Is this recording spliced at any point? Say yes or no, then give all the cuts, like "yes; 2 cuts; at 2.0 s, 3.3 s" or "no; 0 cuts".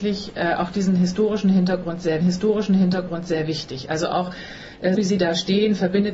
yes; 2 cuts; at 2.2 s, 4.9 s